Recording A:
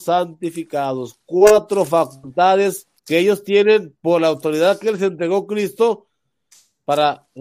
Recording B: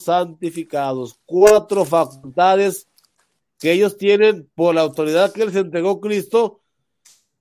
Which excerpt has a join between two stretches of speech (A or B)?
A